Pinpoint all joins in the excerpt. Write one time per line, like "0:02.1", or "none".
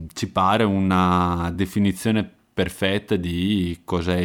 none